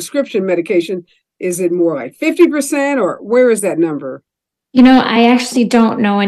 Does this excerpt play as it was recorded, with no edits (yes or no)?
yes